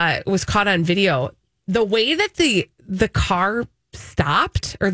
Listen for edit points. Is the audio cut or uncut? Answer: uncut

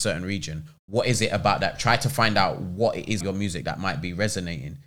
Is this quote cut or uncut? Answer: cut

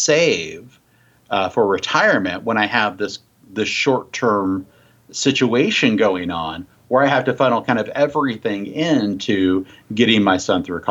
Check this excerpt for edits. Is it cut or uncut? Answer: uncut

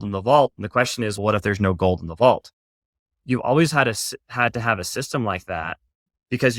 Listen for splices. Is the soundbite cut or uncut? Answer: uncut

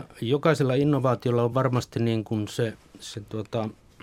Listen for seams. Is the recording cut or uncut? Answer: uncut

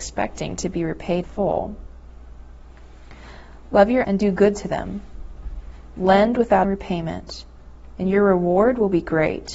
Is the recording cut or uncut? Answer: cut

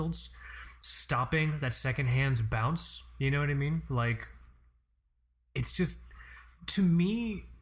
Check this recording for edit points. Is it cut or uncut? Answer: uncut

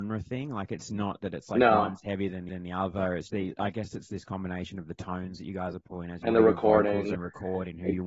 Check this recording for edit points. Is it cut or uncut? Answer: cut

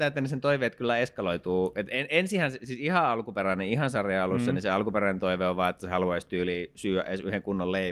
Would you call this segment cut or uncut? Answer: uncut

